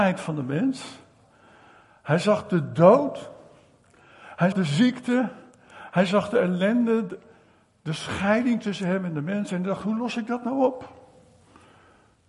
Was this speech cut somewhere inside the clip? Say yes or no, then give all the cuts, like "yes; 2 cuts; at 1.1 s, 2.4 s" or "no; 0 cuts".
yes; 1 cut; at 4.5 s